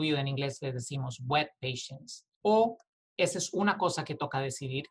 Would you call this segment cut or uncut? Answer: uncut